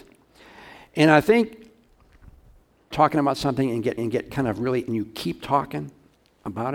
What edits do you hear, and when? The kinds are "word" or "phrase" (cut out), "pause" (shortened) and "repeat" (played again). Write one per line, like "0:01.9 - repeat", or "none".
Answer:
0:02.9 - phrase
0:04.0 - repeat
0:04.9 - phrase